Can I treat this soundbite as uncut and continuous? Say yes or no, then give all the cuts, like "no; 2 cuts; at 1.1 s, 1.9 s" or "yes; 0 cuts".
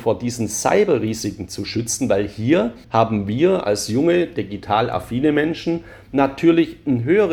no; 1 cut; at 2.8 s